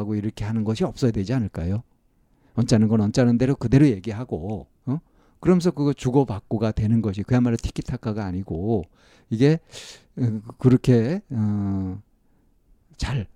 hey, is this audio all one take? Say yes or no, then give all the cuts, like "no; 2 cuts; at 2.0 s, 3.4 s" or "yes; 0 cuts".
no; 2 cuts; at 4.8 s, 11.2 s